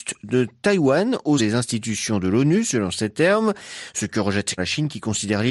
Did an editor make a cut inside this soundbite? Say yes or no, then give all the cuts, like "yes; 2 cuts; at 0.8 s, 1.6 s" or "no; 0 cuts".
yes; 2 cuts; at 1.4 s, 4.6 s